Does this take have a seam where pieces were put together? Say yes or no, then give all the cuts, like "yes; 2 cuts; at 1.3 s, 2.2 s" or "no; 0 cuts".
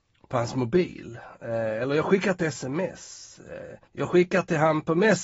yes; 1 cut; at 3.9 s